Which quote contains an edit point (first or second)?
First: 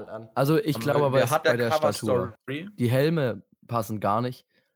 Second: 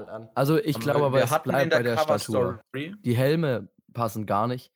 first